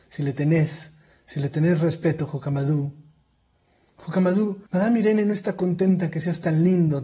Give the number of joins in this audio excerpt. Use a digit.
1